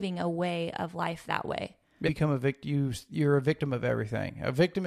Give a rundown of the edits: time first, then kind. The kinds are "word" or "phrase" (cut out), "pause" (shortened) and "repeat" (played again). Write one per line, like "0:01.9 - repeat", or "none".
0:02.1 - word